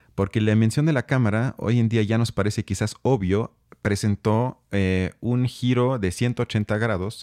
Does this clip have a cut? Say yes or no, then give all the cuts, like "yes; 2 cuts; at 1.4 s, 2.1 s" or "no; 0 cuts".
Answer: no; 0 cuts